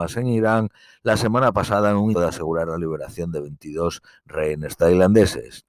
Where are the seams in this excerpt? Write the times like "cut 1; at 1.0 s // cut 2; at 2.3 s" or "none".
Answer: cut 1; at 2.1 s